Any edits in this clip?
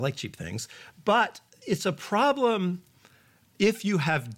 no; 0 cuts

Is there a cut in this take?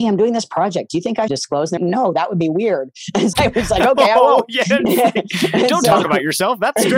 yes; 3 cuts; at 1.3 s, 1.8 s, 3.3 s

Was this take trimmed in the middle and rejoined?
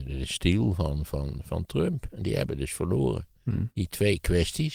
no; 0 cuts

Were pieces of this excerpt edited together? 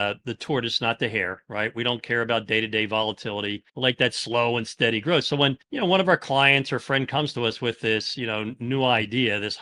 yes; 2 cuts; at 3.7 s, 5.6 s

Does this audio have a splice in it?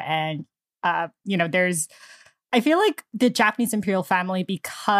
no; 0 cuts

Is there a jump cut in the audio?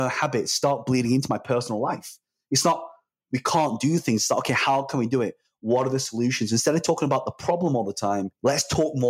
no; 0 cuts

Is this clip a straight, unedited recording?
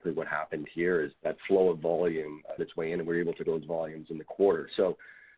no; 3 cuts; at 1.1 s, 2.6 s, 3.4 s

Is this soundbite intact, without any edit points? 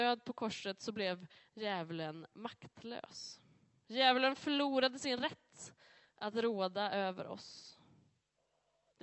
yes; 0 cuts

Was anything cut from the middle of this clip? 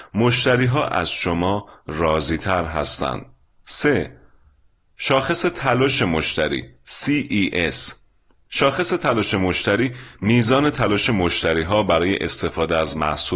no; 0 cuts

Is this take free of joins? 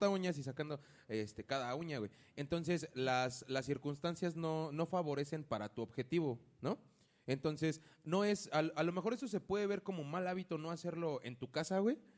yes; 0 cuts

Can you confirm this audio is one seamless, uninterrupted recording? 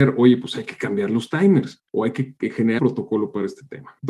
no; 2 cuts; at 1.9 s, 2.8 s

